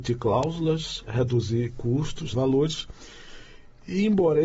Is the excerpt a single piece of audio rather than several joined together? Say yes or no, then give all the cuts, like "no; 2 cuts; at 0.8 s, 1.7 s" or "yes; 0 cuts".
no; 2 cuts; at 1.1 s, 2.3 s